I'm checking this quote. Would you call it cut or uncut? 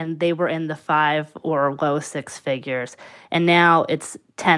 uncut